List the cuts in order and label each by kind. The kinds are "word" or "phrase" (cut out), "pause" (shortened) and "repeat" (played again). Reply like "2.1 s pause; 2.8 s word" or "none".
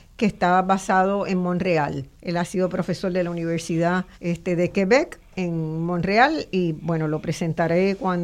2.1 s pause; 4.1 s pause